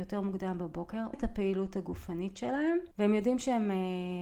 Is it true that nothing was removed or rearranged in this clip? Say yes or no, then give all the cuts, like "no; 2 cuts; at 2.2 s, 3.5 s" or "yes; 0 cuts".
no; 2 cuts; at 1.1 s, 2.9 s